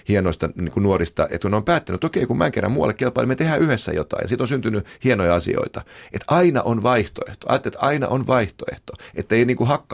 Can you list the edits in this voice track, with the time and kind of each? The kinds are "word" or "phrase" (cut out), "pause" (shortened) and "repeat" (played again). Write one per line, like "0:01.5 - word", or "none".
none